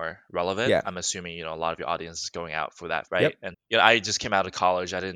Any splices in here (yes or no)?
yes